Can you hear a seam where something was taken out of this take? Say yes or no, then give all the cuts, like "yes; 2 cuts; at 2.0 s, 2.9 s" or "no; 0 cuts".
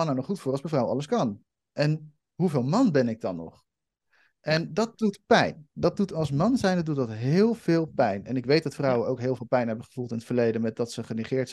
no; 0 cuts